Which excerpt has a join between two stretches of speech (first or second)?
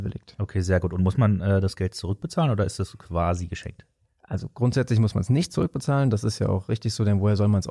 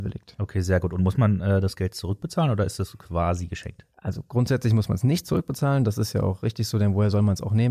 second